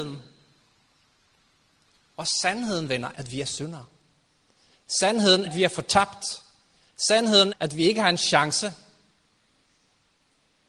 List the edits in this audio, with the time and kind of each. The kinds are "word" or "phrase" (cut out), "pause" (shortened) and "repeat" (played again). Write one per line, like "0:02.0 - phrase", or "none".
0:03.1 - word
0:05.4 - word
0:07.5 - word